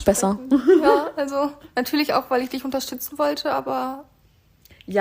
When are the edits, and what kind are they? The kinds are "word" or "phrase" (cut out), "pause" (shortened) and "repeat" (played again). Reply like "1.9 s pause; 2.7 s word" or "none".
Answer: 1.6 s pause